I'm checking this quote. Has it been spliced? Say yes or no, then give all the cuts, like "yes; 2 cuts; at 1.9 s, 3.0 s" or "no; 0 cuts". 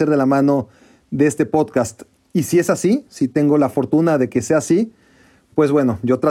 no; 0 cuts